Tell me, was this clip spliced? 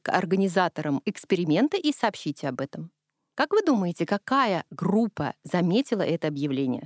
no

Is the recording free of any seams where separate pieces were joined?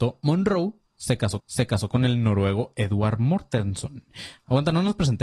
no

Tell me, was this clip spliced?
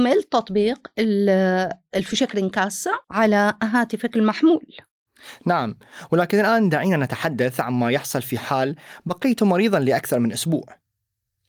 yes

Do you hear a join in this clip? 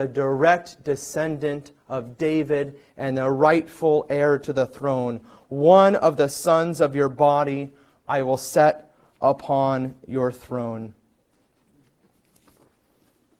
no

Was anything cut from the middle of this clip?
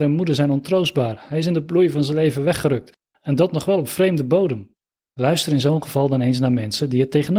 no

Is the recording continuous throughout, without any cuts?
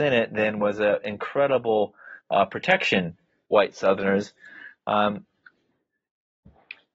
no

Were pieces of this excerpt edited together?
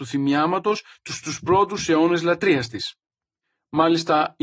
no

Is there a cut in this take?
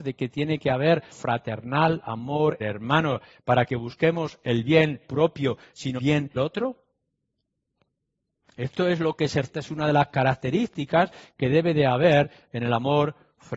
yes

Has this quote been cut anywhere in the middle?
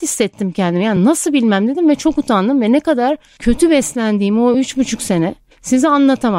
no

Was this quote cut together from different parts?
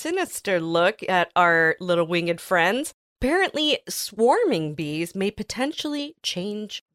no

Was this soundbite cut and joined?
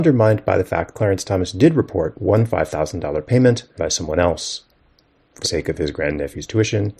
yes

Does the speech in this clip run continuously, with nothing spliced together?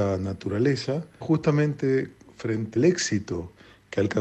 no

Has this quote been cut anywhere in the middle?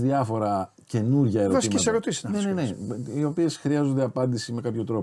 no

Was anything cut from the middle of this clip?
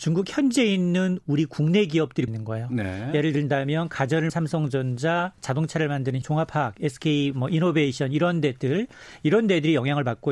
yes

